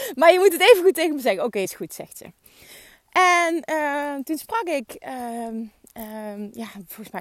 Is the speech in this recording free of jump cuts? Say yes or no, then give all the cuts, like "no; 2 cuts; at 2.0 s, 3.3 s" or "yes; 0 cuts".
yes; 0 cuts